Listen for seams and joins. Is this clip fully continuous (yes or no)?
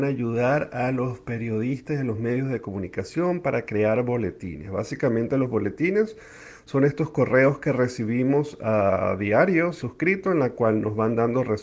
no